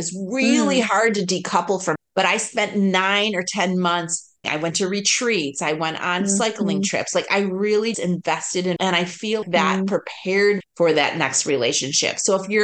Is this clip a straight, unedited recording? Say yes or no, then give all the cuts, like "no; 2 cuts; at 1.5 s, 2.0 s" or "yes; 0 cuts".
no; 6 cuts; at 2.0 s, 4.4 s, 7.9 s, 8.8 s, 9.4 s, 10.6 s